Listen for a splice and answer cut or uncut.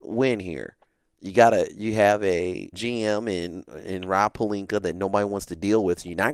cut